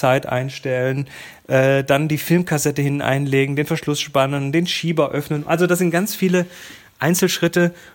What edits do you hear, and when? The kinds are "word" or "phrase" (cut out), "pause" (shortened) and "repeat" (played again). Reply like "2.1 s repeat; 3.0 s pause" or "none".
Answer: none

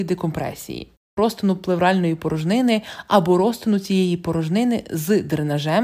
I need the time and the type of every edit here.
1.2 s word

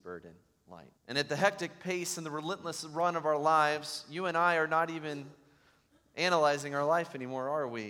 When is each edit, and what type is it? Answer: 1.0 s pause

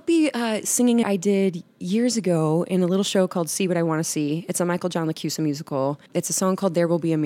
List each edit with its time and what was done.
1.0 s phrase; 6.1 s pause

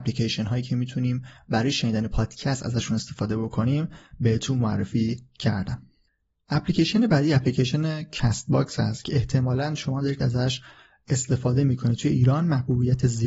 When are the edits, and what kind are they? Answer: none

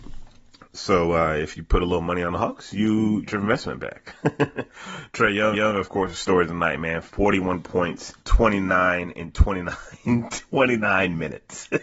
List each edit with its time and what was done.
3.3 s phrase; 5.5 s repeat; 8.2 s pause

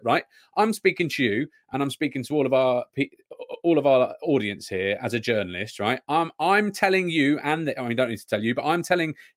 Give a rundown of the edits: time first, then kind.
none

